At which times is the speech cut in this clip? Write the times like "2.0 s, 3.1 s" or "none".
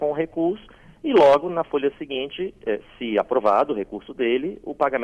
none